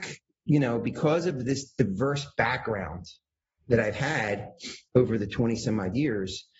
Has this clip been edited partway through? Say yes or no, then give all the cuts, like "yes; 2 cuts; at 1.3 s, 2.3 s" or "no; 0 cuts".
no; 0 cuts